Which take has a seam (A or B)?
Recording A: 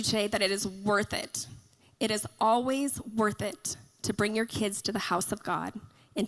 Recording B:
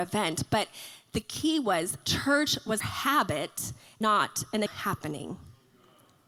B